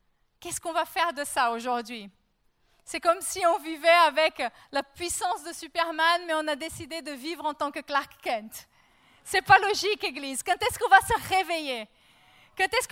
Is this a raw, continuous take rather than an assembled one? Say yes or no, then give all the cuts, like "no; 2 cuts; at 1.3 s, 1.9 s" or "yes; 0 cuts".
yes; 0 cuts